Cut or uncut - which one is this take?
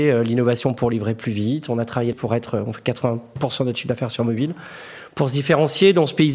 cut